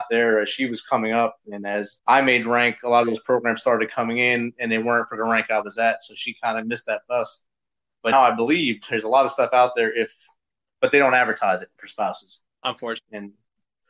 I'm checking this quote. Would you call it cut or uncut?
cut